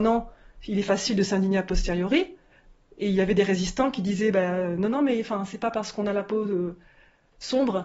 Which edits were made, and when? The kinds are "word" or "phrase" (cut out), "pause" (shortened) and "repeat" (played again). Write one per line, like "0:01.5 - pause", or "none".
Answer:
none